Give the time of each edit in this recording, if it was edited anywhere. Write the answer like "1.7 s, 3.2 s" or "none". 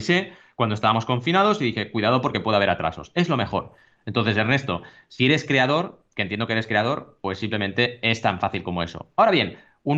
none